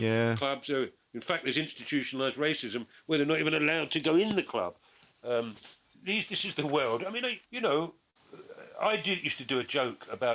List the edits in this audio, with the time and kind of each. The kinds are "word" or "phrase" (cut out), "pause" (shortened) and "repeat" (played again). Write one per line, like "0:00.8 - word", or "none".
0:05.9 - word
0:07.5 - pause